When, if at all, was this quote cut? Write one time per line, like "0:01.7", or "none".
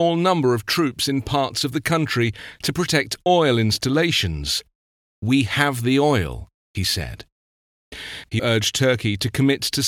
0:08.4